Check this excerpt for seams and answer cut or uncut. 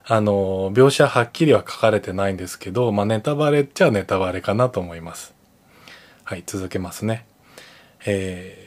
uncut